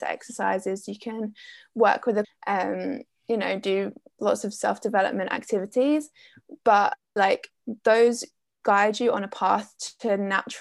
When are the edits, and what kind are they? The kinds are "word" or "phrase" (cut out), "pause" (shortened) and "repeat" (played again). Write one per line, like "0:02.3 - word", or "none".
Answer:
0:02.2 - phrase
0:07.2 - word